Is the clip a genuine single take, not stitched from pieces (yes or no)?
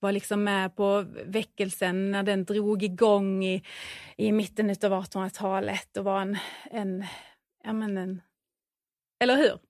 yes